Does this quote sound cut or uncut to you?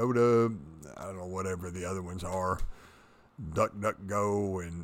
uncut